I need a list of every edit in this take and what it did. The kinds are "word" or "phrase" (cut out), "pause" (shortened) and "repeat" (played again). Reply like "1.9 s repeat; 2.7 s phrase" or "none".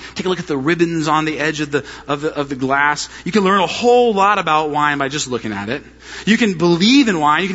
none